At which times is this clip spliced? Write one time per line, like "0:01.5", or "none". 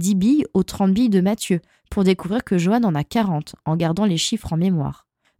none